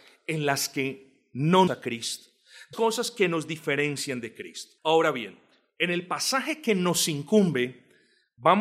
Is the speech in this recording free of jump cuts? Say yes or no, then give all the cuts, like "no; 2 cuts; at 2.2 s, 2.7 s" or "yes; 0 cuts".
no; 3 cuts; at 1.7 s, 2.7 s, 4.8 s